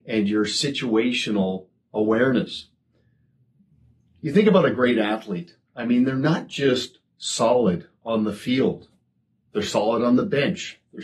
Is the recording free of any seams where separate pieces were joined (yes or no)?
yes